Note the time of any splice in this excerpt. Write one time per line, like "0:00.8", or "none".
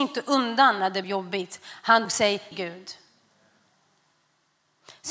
0:01.0
0:02.0
0:02.5